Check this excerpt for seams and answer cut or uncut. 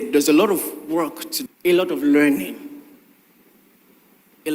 cut